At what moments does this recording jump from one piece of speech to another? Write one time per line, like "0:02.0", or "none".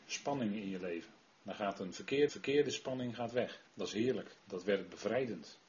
0:01.2
0:02.3
0:03.7

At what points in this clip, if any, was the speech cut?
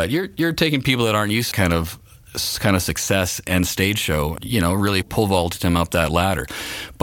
0:01.5
0:04.4
0:05.0

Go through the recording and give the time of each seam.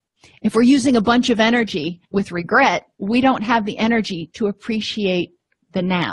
0:02.0
0:02.9

